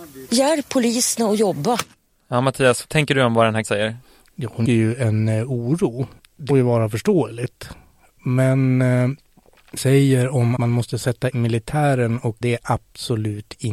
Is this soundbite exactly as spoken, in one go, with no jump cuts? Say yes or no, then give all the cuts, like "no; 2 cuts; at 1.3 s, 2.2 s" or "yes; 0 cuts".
no; 9 cuts; at 2.8 s, 3.6 s, 4.6 s, 6.2 s, 6.5 s, 9.8 s, 10.6 s, 11.3 s, 12.4 s